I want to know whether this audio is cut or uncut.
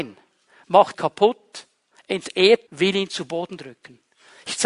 cut